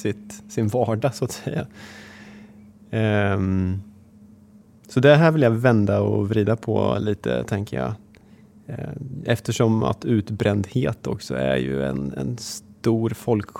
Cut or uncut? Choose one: uncut